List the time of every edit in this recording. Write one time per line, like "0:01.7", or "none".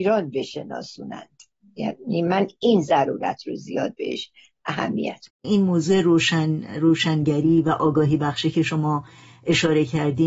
0:01.6
0:05.3